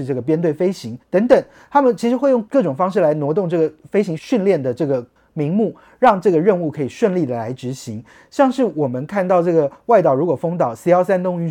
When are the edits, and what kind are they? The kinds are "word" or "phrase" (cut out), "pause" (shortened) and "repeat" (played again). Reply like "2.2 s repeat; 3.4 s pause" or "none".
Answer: 1.0 s pause